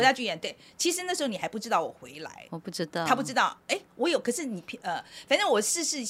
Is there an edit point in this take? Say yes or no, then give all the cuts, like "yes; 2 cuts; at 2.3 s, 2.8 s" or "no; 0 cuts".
no; 0 cuts